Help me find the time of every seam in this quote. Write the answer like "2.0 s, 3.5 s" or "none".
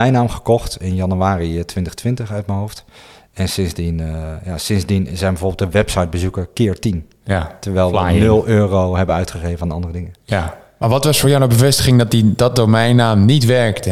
none